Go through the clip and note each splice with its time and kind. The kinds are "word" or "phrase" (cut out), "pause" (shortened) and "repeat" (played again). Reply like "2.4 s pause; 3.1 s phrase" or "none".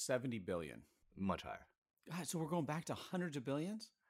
none